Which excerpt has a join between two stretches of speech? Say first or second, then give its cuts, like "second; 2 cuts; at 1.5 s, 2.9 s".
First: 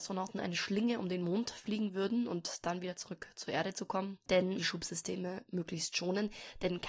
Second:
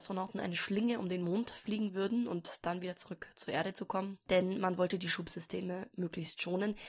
first; 1 cut; at 4.6 s